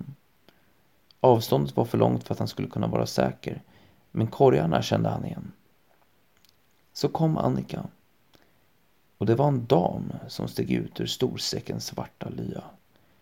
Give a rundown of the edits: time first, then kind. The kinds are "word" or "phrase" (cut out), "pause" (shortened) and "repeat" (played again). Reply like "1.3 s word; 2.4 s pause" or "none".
none